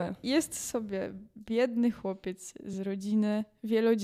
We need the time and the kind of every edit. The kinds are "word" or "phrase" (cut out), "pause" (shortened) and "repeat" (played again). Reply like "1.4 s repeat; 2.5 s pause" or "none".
none